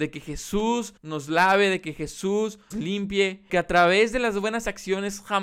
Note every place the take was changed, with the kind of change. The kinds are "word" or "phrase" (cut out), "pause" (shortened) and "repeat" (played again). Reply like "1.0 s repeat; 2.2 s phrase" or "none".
1.0 s pause; 2.7 s word; 3.5 s word